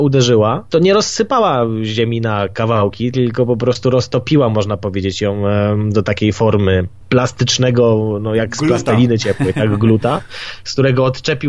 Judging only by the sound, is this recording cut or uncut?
uncut